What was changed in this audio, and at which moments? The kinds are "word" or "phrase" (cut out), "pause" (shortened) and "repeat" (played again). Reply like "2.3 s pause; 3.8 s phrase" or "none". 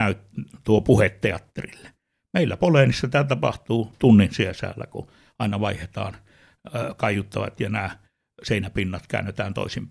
none